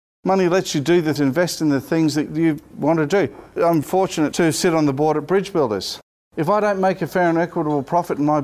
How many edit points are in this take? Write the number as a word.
three